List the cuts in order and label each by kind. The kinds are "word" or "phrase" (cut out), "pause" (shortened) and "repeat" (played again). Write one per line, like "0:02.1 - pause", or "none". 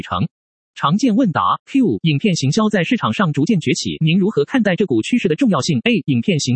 0:02.0 - phrase